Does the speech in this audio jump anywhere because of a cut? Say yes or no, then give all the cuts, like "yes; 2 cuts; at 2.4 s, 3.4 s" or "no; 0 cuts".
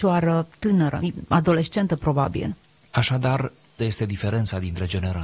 yes; 1 cut; at 3.8 s